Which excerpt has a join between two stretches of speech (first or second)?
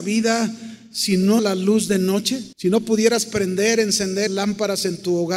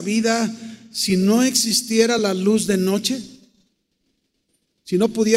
first